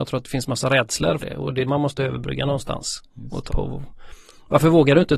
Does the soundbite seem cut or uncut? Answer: cut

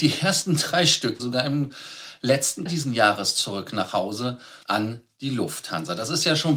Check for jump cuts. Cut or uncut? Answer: cut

